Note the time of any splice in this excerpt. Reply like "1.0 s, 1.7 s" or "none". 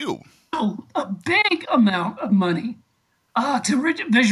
none